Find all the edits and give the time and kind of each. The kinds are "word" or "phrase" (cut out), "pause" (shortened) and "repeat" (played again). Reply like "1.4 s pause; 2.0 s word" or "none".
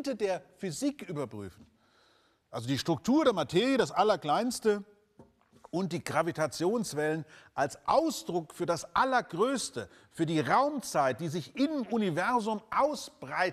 none